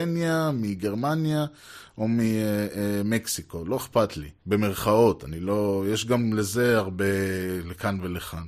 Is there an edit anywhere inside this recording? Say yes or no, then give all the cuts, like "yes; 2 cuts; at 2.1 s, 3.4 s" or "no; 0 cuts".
yes; 1 cut; at 4.4 s